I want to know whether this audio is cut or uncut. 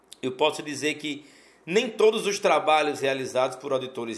uncut